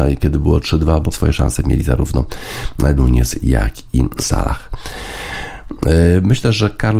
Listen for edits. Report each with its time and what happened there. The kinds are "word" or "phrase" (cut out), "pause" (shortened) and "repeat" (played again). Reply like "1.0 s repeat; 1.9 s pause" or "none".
1.1 s word; 3.0 s word; 4.2 s word